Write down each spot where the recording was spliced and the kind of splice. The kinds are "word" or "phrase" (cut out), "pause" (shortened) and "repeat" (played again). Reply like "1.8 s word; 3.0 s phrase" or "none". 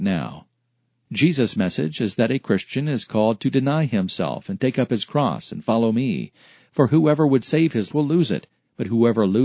7.9 s word